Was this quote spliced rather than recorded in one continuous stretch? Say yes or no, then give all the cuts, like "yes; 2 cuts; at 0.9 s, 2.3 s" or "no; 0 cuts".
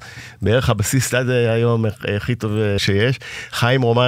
yes; 1 cut; at 2.8 s